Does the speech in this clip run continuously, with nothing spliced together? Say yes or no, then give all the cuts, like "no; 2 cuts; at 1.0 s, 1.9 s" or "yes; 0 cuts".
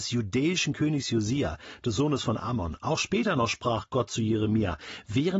yes; 0 cuts